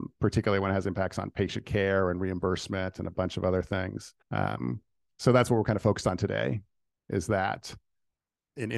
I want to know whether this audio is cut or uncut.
cut